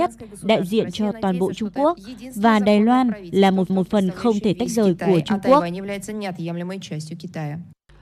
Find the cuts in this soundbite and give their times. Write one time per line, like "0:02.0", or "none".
0:03.7